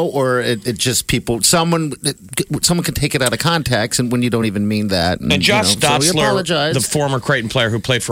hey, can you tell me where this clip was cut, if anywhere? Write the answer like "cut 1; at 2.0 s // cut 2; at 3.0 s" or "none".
none